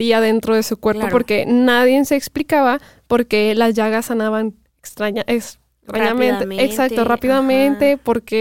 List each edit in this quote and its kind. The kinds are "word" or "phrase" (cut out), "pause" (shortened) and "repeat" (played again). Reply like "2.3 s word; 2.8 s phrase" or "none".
none